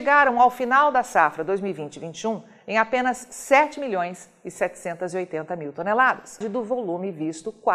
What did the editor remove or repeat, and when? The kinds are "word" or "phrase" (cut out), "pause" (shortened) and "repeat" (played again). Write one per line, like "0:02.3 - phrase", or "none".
0:06.4 - phrase